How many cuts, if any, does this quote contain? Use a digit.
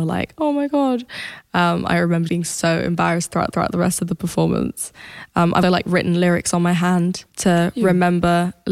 4